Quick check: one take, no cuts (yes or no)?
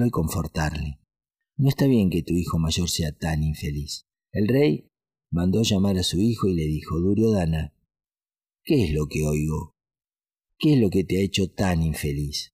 no